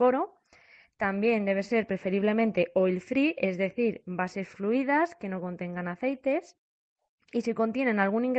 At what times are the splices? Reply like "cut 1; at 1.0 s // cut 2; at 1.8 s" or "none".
none